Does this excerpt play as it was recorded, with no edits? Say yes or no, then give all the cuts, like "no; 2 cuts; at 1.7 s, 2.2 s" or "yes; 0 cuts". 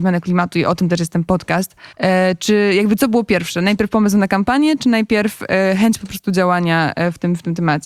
no; 1 cut; at 1.9 s